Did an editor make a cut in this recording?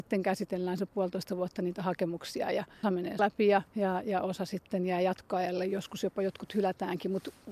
yes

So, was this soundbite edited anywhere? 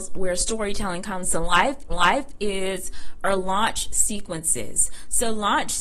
yes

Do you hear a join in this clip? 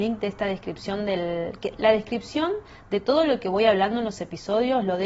no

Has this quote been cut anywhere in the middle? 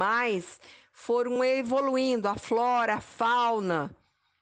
no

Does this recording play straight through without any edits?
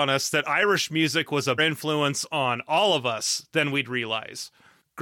no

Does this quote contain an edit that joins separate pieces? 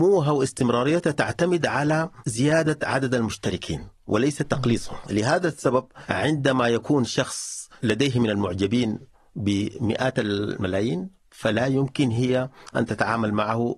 no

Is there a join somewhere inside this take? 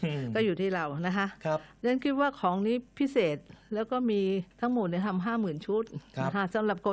yes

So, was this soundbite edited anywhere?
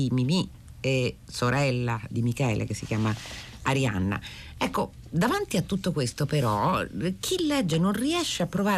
no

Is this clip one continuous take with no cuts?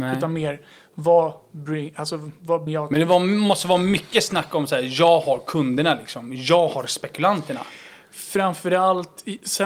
no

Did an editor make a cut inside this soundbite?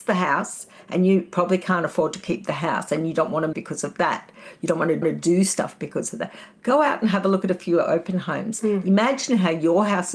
yes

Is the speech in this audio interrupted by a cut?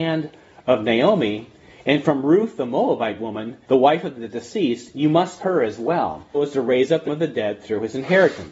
yes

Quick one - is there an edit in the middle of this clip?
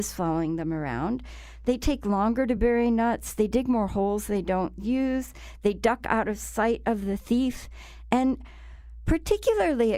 no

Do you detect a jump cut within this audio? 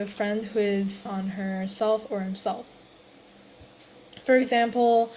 yes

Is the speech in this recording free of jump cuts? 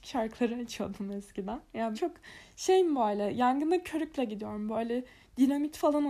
no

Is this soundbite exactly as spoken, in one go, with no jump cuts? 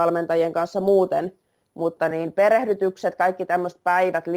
yes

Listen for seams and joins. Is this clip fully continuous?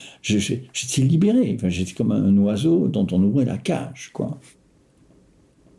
yes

